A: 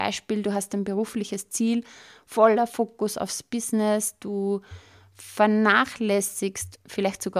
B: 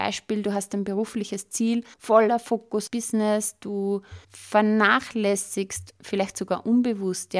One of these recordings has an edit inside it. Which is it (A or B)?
B